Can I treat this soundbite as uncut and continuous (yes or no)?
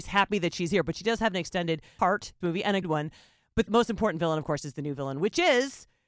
no